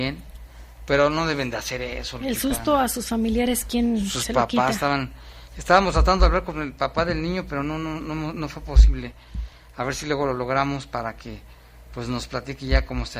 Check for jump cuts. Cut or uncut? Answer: uncut